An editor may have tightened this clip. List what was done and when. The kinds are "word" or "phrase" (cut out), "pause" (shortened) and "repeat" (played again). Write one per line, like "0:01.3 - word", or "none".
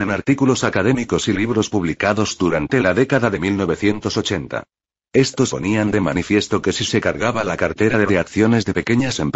0:01.7 - word
0:05.5 - word
0:08.1 - word

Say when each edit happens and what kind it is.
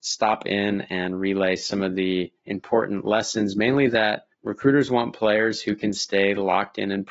0:02.4 - pause
0:04.3 - pause

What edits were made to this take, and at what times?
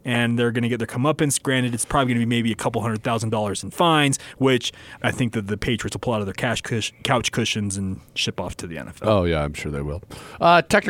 0:05.0 - word

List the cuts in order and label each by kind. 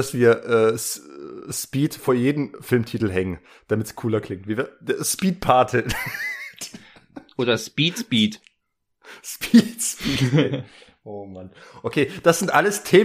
none

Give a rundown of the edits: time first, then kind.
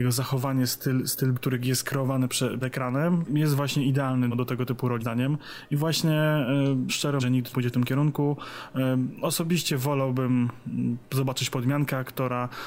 0:01.3 - word
0:02.6 - word
0:03.3 - word
0:04.3 - word
0:05.0 - word
0:06.9 - word
0:07.2 - word
0:07.5 - word

